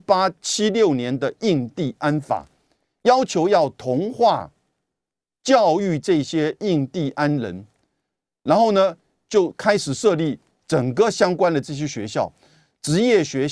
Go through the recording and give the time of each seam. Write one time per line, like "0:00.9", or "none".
none